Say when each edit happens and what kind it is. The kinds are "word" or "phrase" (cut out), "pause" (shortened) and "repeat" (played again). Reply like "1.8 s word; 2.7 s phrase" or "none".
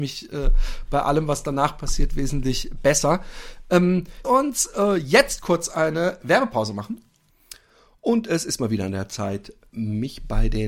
4.2 s word